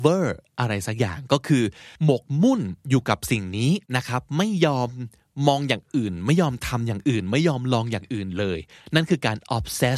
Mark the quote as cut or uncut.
cut